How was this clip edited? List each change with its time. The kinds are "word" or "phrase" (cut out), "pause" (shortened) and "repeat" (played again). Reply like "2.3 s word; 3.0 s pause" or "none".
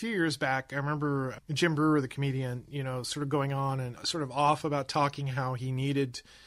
none